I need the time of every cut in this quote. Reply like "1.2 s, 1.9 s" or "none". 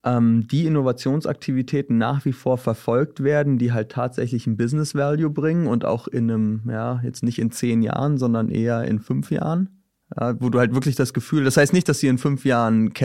none